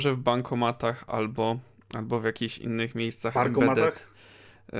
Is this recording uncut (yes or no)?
yes